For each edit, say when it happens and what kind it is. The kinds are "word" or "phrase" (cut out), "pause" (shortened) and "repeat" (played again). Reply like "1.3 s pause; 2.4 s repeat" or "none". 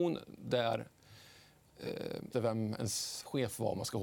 2.3 s phrase